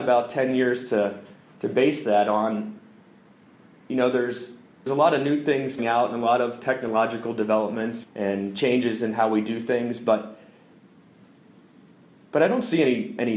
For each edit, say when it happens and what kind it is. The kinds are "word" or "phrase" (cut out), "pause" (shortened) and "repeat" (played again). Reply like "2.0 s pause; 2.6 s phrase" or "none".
4.9 s word; 5.8 s word; 8.0 s word